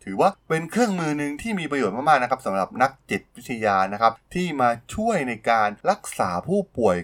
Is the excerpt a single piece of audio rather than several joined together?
no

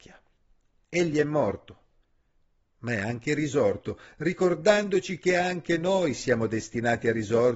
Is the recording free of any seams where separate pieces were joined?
yes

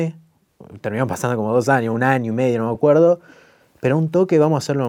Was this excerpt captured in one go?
yes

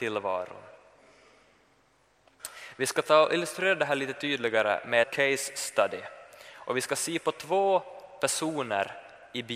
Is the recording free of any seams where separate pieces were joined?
no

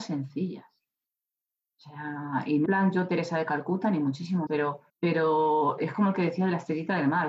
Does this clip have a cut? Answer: yes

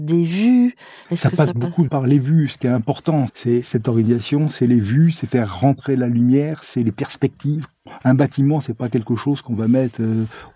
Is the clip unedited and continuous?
no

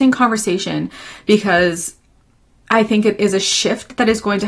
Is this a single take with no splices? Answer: yes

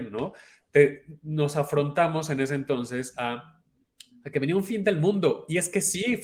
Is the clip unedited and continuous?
yes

